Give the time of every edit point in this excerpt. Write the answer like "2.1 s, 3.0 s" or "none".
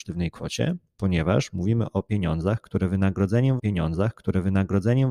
3.6 s